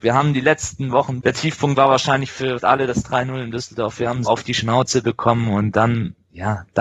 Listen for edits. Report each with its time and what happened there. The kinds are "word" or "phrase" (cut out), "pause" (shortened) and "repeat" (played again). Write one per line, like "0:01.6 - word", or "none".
0:01.2 - word
0:02.6 - word
0:04.3 - word